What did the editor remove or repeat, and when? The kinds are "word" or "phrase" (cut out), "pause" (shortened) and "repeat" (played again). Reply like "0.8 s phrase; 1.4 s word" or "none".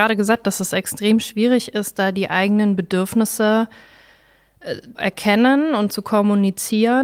4.9 s word

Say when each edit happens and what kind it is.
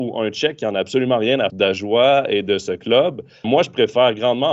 1.5 s word; 3.4 s word

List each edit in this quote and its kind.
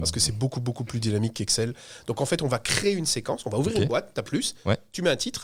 4.3 s word

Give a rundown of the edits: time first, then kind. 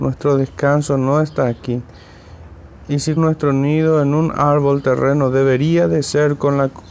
3.2 s word

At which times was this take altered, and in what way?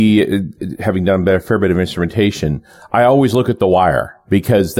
none

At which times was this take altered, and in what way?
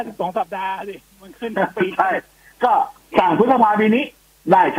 none

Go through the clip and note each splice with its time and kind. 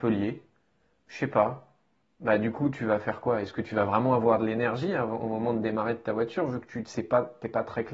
none

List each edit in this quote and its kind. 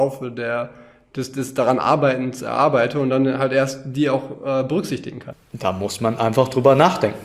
none

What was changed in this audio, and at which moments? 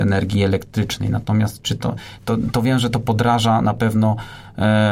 none

